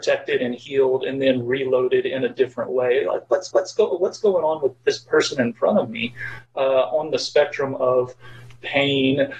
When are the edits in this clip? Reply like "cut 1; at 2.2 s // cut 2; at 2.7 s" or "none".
cut 1; at 3.5 s